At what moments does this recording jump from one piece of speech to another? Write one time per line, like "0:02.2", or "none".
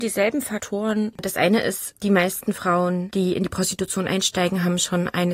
none